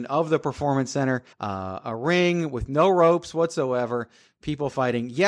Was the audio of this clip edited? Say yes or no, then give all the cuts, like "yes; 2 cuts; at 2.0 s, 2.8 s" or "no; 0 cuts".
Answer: yes; 1 cut; at 1.3 s